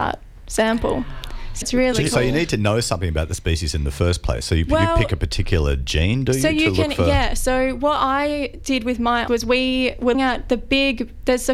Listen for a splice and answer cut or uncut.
cut